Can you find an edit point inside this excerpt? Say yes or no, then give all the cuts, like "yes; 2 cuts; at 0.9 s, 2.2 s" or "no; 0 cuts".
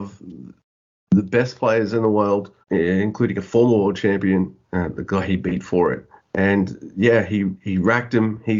yes; 3 cuts; at 2.6 s, 4.6 s, 6.2 s